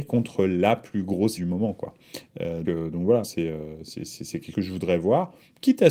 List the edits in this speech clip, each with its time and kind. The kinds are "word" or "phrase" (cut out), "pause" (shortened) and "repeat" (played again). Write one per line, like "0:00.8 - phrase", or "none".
0:01.4 - word
0:02.6 - word
0:03.2 - word
0:04.5 - word